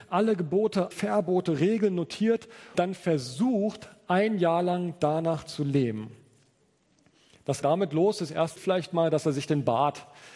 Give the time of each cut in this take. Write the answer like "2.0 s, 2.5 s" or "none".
0.9 s, 2.7 s, 7.6 s, 8.6 s